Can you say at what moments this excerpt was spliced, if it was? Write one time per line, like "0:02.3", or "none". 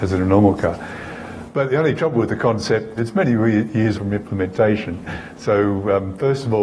0:03.0
0:03.9